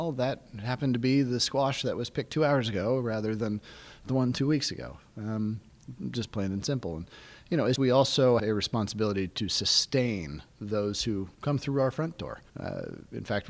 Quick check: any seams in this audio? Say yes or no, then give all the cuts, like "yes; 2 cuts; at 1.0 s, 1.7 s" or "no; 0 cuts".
yes; 5 cuts; at 7.8 s, 8.4 s, 10.5 s, 11.3 s, 12.5 s